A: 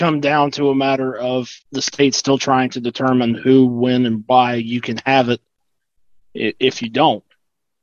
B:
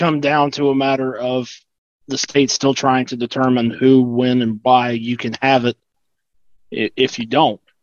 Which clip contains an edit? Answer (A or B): A